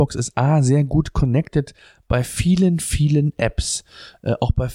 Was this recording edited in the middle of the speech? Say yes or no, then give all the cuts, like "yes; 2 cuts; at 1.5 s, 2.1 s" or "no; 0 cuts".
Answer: no; 0 cuts